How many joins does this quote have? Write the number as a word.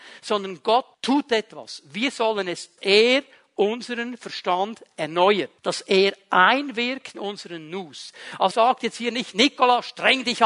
five